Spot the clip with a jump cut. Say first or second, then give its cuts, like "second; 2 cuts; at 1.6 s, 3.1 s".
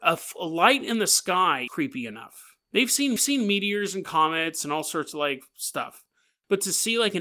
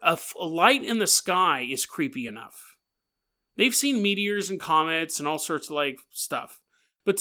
first; 3 cuts; at 1.7 s, 2.6 s, 3.2 s